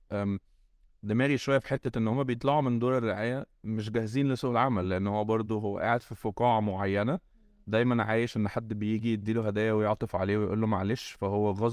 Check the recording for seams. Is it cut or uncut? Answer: uncut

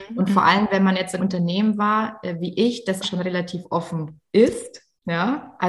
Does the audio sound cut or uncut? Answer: cut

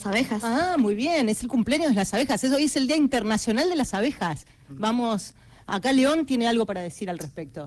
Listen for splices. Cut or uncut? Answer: uncut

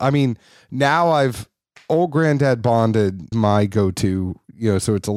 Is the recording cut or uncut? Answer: cut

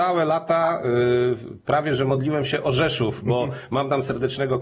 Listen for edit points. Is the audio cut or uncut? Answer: uncut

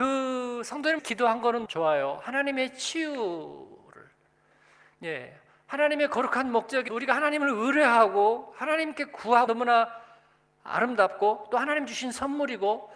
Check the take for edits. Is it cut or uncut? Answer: cut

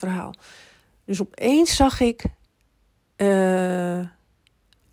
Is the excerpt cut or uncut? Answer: uncut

